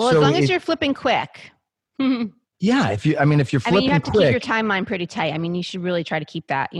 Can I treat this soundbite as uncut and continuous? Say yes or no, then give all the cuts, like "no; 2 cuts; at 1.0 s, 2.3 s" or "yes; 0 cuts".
no; 1 cut; at 2.5 s